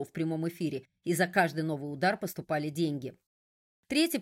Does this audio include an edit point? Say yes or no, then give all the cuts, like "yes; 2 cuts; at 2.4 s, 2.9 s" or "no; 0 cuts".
no; 0 cuts